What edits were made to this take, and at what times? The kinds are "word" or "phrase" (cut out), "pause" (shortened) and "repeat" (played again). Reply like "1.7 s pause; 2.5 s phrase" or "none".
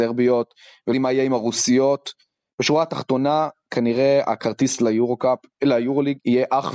0.9 s word